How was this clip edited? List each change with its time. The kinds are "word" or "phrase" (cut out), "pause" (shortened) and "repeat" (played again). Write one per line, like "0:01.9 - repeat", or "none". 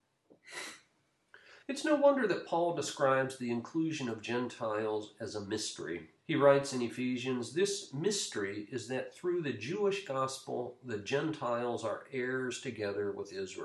0:01.6 - pause
0:06.2 - pause